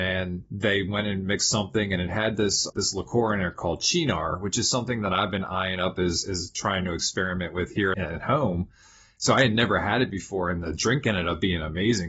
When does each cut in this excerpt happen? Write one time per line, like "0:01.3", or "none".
0:02.7
0:07.9